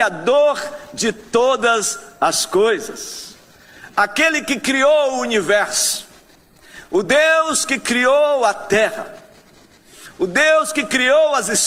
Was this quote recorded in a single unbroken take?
yes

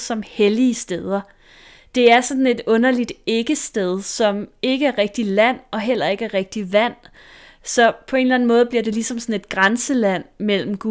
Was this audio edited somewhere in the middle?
no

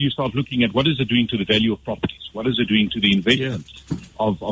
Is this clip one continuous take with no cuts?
yes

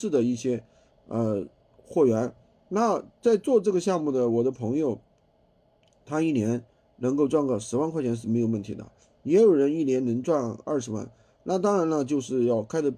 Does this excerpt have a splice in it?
no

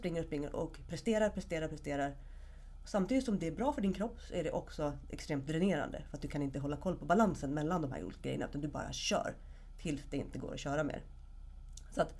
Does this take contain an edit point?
no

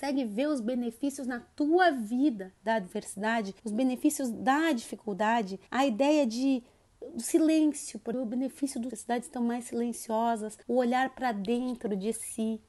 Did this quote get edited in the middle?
yes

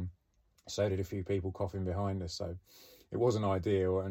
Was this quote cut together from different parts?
no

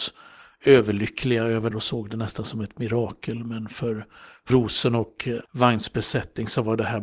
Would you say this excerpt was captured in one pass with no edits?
no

